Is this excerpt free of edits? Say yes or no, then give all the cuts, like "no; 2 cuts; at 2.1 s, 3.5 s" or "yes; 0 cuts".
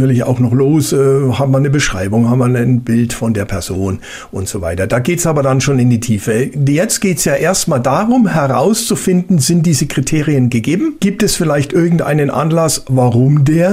yes; 0 cuts